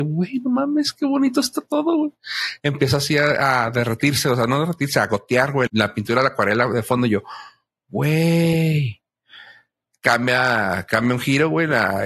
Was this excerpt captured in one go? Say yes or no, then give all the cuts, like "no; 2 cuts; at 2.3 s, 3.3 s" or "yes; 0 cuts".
no; 1 cut; at 5.7 s